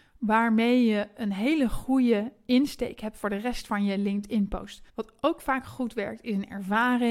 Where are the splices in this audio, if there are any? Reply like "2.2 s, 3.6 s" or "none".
4.9 s

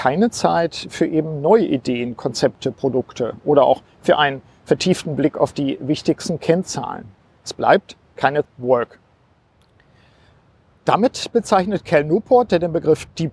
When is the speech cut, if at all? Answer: 7.2 s, 8.4 s

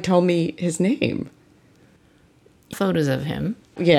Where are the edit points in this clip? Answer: 2.7 s

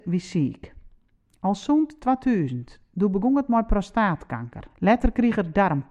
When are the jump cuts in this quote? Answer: 4.7 s

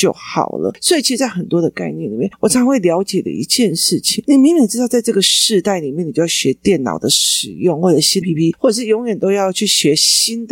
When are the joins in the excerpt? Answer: 8.2 s

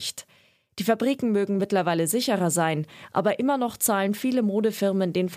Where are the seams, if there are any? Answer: none

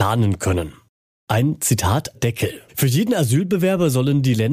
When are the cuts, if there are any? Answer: 2.1 s, 2.7 s

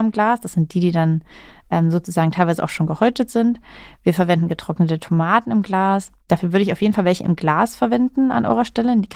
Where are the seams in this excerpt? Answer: none

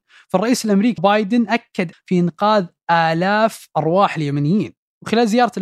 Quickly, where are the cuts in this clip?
1.0 s, 1.9 s

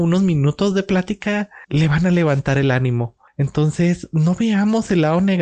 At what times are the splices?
1.6 s, 3.3 s

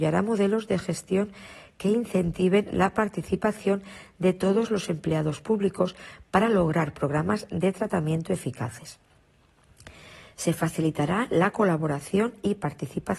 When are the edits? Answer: none

